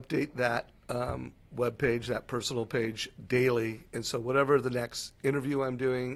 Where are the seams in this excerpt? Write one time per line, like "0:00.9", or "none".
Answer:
none